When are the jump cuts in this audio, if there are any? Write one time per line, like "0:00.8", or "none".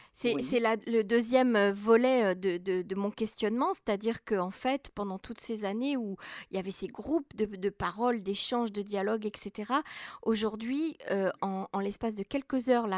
none